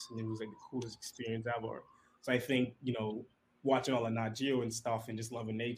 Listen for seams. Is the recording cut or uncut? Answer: uncut